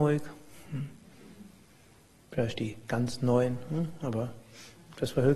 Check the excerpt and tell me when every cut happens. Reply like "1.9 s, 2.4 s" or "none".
none